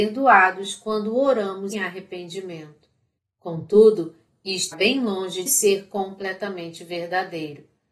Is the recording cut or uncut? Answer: cut